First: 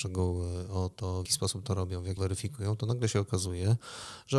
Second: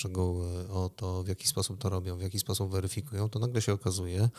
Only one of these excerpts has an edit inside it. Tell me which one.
first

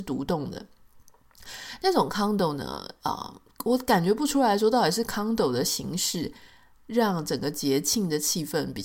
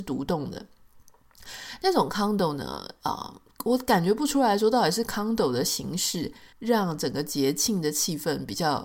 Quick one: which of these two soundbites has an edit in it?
second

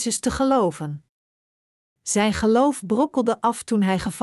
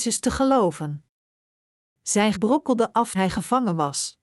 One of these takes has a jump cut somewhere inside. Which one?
second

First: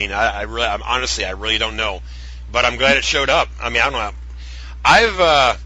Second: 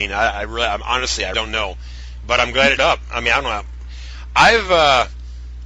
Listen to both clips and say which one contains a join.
second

